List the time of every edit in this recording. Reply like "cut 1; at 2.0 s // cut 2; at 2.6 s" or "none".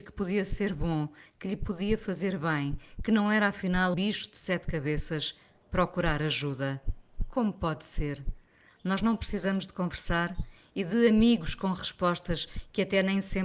cut 1; at 3.9 s